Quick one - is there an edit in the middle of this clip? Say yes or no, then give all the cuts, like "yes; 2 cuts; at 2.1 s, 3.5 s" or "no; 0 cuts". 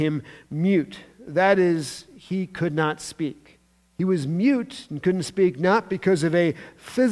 yes; 1 cut; at 3.8 s